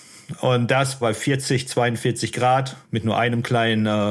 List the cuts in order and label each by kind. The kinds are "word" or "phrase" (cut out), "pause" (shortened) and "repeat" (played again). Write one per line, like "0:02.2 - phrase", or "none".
0:01.0 - phrase
0:02.8 - pause